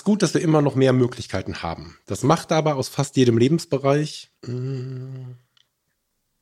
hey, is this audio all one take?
no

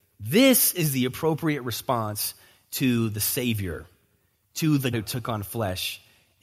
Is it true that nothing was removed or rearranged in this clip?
no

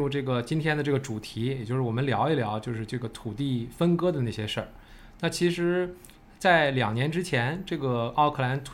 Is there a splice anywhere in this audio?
no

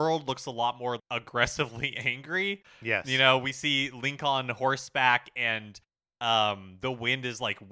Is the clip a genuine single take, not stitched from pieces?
no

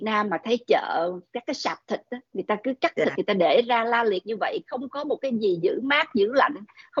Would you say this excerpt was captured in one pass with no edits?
yes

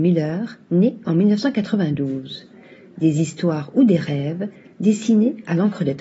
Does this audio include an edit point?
no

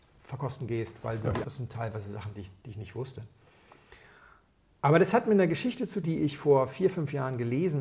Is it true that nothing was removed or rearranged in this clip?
no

